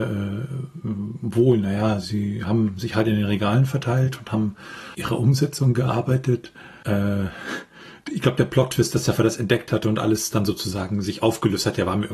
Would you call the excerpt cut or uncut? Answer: cut